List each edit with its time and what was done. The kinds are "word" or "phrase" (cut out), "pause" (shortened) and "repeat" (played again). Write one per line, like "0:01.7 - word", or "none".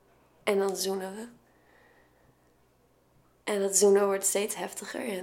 none